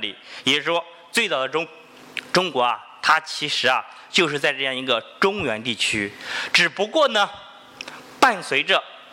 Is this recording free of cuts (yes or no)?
yes